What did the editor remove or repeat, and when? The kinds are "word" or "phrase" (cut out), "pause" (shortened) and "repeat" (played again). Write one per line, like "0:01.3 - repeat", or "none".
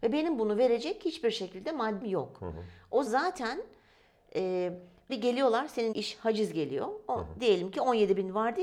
0:02.0 - word
0:03.1 - word
0:05.1 - word
0:05.9 - word